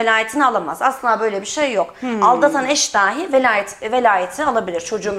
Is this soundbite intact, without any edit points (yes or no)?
yes